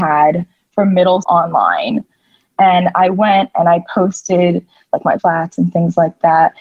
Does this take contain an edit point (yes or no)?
yes